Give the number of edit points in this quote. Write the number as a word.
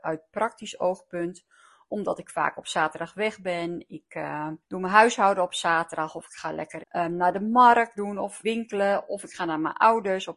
four